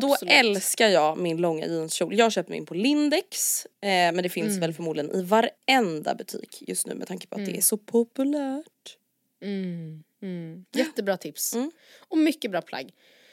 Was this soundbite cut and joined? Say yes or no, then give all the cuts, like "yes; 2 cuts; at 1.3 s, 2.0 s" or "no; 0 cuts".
no; 0 cuts